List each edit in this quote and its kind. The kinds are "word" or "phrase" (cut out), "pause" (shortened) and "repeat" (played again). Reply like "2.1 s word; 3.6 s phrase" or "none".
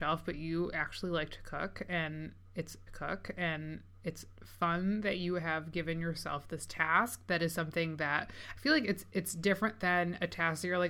2.9 s repeat